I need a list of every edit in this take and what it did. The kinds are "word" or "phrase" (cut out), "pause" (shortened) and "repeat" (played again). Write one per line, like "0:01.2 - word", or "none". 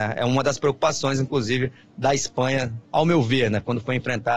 0:02.8 - pause